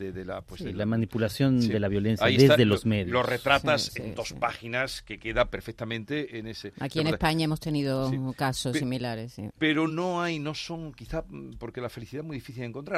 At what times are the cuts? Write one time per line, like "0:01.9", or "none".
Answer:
0:09.9